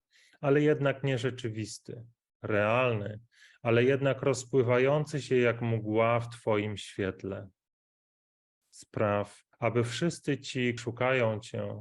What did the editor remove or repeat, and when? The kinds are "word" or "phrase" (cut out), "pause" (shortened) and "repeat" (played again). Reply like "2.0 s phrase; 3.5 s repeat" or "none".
9.5 s pause; 10.8 s word